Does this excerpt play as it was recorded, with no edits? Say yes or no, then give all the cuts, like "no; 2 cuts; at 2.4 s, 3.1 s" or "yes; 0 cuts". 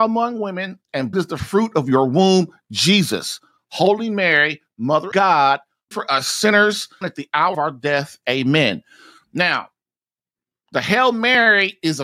no; 5 cuts; at 1.1 s, 5.1 s, 5.9 s, 7.0 s, 7.5 s